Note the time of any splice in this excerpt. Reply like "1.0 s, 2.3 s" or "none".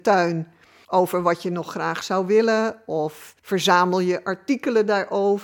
3.4 s